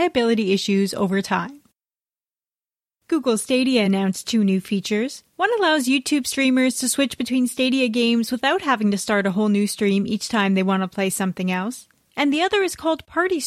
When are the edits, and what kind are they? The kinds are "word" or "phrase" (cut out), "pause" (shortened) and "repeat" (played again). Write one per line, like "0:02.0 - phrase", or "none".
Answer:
none